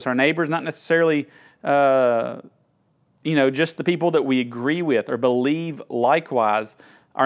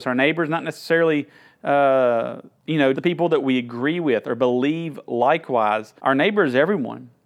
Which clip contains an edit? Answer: second; 3 cuts; at 2.5 s, 2.9 s, 6.0 s

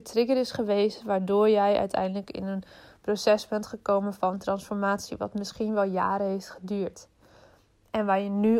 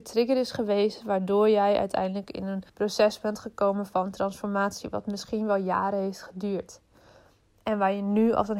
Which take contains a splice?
second; 1 cut; at 2.7 s

